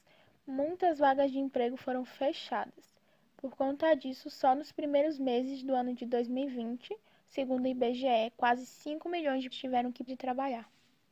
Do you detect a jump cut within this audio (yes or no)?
yes